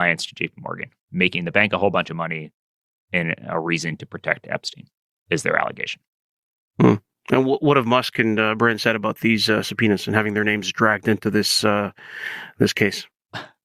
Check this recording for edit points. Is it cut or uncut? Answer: uncut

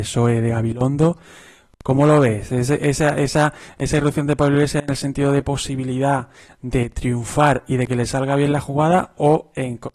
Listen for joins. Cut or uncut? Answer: uncut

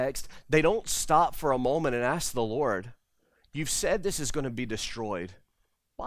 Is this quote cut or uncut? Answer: uncut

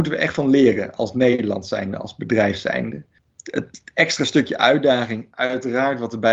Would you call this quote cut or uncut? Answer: uncut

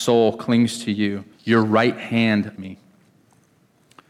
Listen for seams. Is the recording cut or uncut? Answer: cut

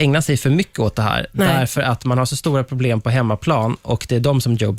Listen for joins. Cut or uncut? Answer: uncut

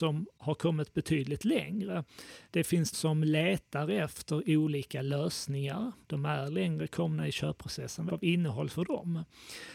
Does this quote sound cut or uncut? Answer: cut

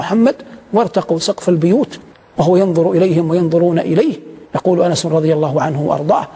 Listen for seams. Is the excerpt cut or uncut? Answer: cut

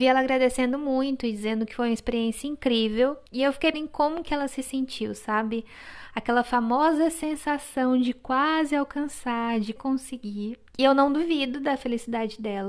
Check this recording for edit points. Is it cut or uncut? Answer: cut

